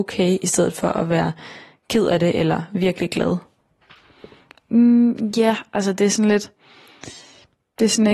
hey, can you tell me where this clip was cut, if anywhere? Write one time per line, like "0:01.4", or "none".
none